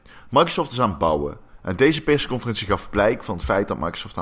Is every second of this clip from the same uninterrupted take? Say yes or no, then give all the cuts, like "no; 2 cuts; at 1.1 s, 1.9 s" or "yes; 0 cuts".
yes; 0 cuts